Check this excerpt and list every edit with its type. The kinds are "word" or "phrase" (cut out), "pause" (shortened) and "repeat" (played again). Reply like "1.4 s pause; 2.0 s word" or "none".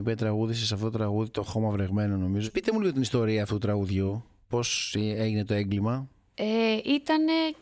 none